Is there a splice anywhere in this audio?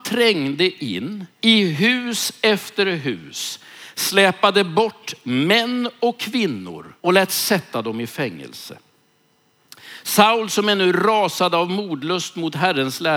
yes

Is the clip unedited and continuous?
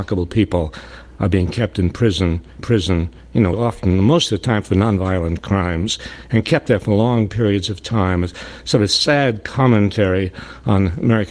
no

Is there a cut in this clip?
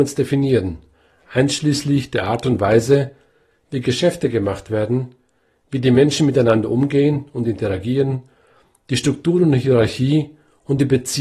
no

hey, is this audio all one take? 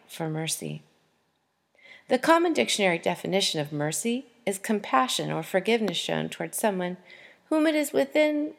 yes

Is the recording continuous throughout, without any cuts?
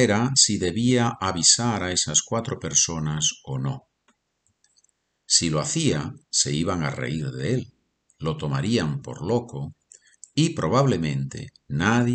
yes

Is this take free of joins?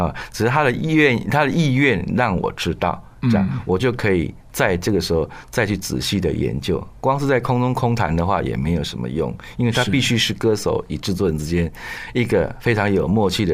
yes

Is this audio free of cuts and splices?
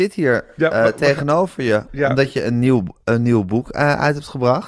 yes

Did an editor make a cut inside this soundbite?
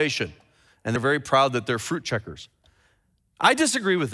yes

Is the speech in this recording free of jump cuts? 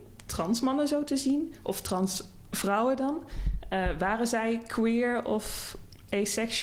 yes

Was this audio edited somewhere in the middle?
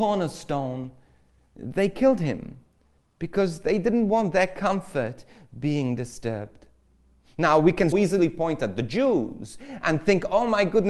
yes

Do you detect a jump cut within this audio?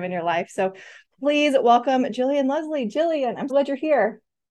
yes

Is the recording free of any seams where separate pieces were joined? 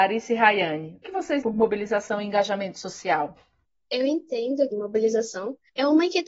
no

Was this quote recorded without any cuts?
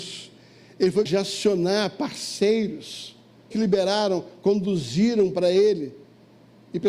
no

